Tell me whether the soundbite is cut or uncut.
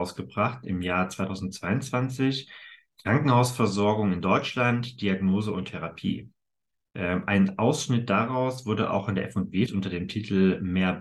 cut